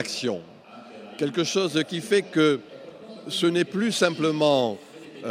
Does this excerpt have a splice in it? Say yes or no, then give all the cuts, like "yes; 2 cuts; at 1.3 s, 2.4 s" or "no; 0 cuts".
no; 0 cuts